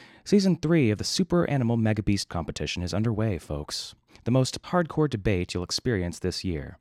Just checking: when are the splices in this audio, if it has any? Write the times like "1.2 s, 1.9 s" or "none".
2.3 s, 4.6 s